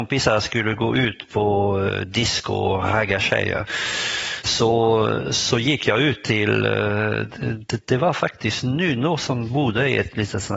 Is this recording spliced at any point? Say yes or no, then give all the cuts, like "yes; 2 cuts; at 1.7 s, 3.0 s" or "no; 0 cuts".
no; 0 cuts